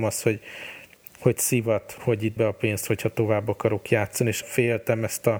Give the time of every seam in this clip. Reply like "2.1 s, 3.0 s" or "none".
2.0 s, 2.4 s, 4.4 s